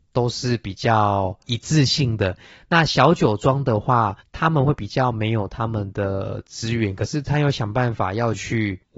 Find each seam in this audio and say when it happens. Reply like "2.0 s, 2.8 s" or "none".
none

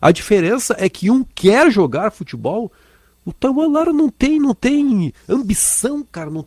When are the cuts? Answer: none

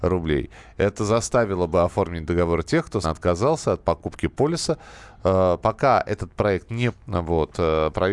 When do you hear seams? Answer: 3.0 s, 6.9 s

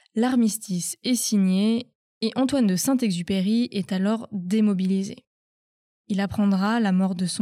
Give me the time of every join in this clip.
none

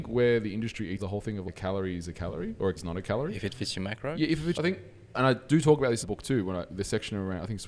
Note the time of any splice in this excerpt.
1.0 s, 2.8 s, 4.5 s, 6.0 s

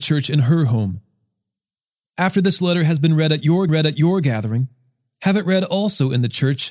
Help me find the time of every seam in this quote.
3.7 s

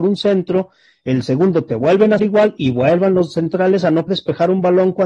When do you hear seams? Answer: 2.2 s, 4.1 s

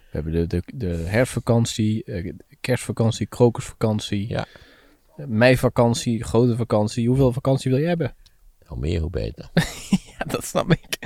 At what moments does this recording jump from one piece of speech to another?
none

